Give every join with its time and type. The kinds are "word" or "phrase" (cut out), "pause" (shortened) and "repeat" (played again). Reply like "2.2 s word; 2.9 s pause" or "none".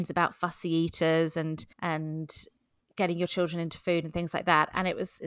1.7 s pause